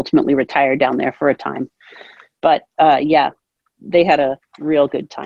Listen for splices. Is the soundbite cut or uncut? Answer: uncut